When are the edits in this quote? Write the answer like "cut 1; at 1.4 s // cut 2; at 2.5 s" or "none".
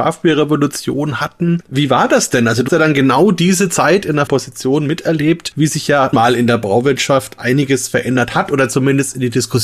cut 1; at 2.7 s // cut 2; at 4.3 s // cut 3; at 6.1 s